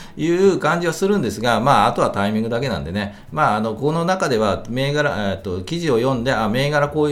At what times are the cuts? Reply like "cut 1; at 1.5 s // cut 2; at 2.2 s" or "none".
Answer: none